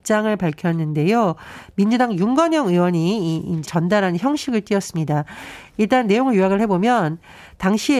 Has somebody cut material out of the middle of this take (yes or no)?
yes